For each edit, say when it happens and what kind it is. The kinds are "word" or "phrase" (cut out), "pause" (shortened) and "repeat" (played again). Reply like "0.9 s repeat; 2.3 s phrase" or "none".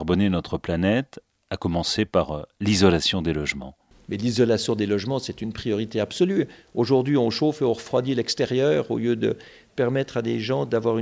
none